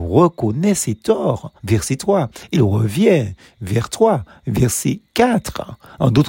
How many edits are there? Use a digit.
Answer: 2